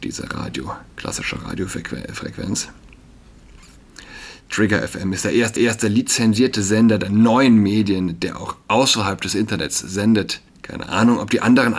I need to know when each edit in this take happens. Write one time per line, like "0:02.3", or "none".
0:00.9
0:05.6
0:10.5